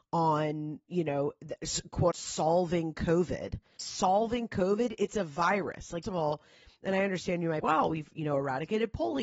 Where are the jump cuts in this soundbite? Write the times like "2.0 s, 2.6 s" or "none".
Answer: 2.1 s, 6.0 s, 7.6 s